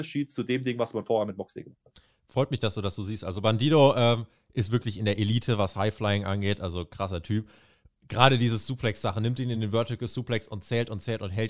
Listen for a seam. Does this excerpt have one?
no; 0 cuts

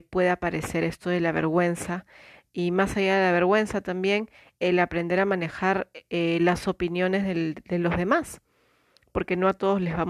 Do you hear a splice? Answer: no; 0 cuts

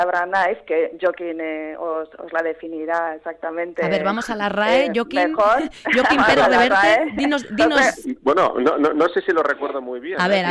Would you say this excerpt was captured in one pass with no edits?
yes; 0 cuts

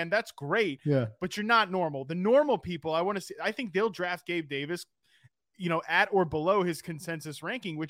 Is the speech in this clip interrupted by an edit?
no; 0 cuts

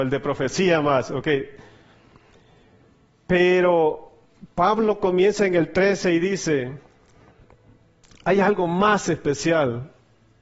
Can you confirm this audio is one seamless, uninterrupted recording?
yes; 0 cuts

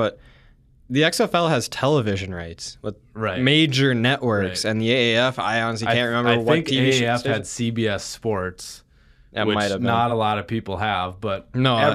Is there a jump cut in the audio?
no; 0 cuts

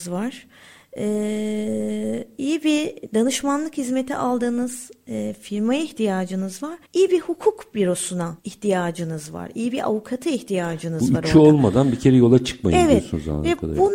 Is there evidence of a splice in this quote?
yes; 2 cuts; at 6.8 s, 8.4 s

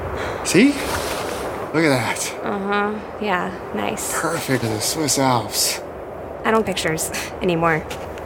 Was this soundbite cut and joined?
yes; 2 cuts; at 4.6 s, 6.6 s

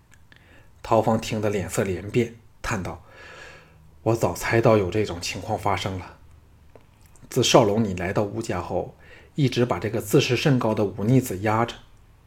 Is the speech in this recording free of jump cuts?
yes; 0 cuts

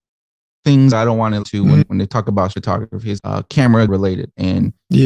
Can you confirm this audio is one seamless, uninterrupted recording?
no; 6 cuts; at 0.9 s, 1.4 s, 1.8 s, 2.5 s, 3.2 s, 3.9 s

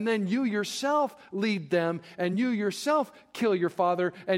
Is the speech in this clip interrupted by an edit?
no; 0 cuts

